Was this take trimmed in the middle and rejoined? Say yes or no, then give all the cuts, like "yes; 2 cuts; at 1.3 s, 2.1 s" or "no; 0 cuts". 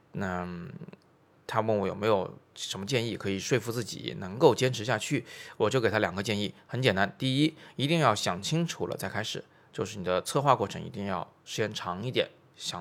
no; 0 cuts